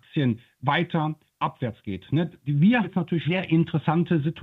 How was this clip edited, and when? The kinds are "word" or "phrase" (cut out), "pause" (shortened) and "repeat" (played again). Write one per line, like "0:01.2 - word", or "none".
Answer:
0:02.8 - word
0:03.2 - word